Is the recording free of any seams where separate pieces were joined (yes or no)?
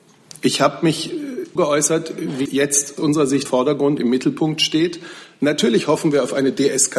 no